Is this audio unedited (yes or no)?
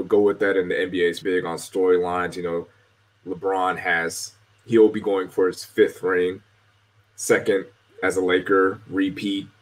no